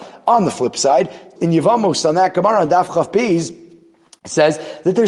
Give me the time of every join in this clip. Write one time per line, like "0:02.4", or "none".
0:01.4

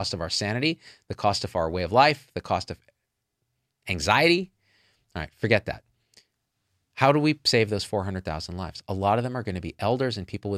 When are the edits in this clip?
none

